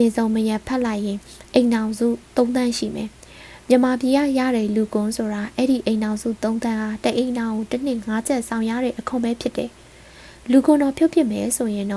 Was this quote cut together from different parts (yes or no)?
yes